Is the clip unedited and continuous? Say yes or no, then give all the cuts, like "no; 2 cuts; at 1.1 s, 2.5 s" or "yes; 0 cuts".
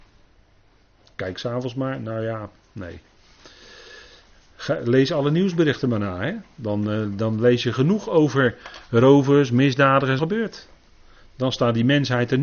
no; 1 cut; at 10.2 s